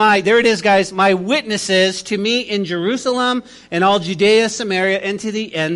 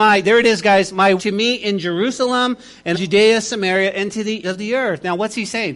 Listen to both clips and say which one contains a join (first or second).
second